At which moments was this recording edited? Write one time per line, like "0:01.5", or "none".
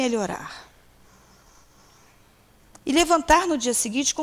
none